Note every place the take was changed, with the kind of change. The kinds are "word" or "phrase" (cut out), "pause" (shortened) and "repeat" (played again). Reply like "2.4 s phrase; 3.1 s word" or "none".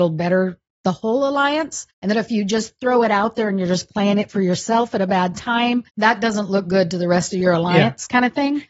1.9 s pause; 5.9 s pause

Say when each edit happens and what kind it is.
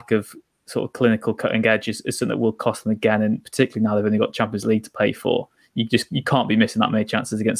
none

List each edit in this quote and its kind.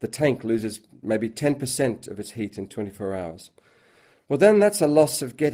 none

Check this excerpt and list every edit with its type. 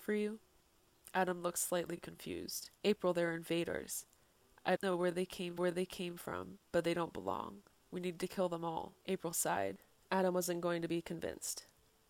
2.8 s pause; 4.8 s word; 5.6 s repeat; 9.0 s pause

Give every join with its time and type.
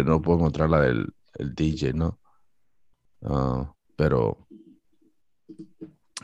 3.9 s pause

